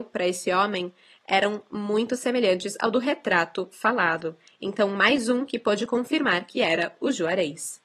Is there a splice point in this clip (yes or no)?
no